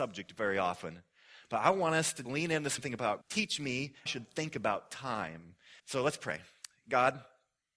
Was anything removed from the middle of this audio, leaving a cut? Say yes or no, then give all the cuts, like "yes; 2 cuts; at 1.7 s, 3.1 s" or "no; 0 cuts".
yes; 5 cuts; at 2.2 s, 2.8 s, 3.2 s, 4.1 s, 5.8 s